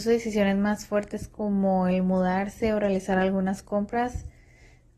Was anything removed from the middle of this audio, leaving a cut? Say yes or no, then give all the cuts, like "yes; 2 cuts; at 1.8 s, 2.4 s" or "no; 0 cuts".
no; 0 cuts